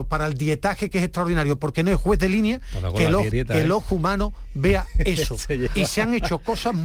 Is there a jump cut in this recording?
yes; 1 cut; at 3.3 s

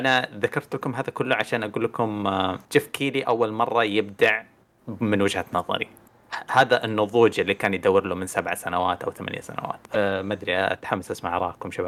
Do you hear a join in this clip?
yes; 2 cuts; at 2.6 s, 9.9 s

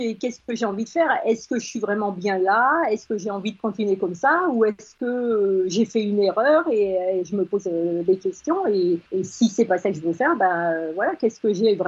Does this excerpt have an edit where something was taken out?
yes; 1 cut; at 9.1 s

